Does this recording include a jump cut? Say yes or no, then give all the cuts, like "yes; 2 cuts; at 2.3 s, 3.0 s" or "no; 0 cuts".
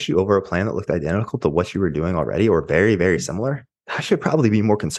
no; 0 cuts